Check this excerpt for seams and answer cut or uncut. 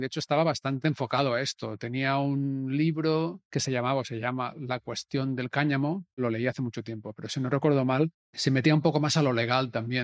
cut